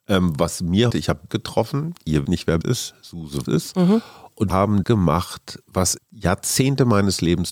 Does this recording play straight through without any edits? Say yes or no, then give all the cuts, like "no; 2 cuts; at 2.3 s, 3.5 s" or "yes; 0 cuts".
no; 8 cuts; at 0.9 s, 1.3 s, 2.2 s, 2.6 s, 3.5 s, 4.5 s, 4.8 s, 6.0 s